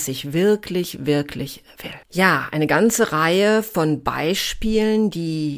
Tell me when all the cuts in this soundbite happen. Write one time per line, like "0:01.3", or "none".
0:02.0